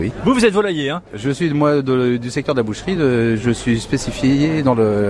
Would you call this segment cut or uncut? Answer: uncut